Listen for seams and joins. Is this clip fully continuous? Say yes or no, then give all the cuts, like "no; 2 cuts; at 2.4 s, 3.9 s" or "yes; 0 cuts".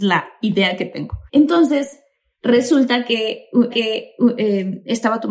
no; 2 cuts; at 1.3 s, 3.7 s